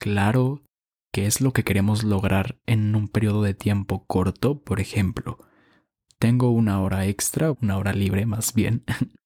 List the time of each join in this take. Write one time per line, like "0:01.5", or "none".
0:07.5